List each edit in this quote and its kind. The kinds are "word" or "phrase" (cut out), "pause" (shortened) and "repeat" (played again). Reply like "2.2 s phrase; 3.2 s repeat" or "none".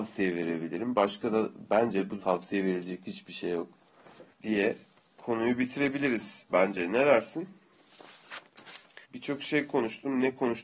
2.2 s word; 4.3 s pause; 9.0 s pause